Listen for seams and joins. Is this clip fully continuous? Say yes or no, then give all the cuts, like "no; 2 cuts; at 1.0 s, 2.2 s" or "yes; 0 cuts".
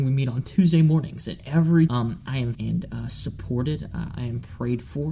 no; 2 cuts; at 1.9 s, 2.5 s